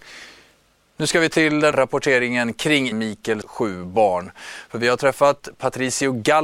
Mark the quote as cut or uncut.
cut